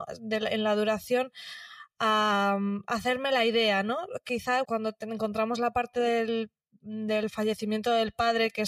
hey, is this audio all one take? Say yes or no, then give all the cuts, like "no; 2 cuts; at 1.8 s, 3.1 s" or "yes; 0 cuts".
no; 1 cut; at 4.6 s